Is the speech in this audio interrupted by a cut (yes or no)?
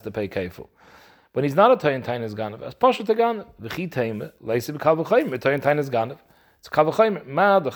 no